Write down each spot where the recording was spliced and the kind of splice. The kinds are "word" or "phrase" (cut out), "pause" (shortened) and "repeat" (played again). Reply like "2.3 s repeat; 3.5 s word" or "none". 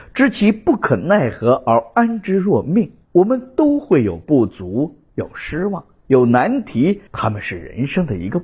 3.0 s pause; 7.1 s pause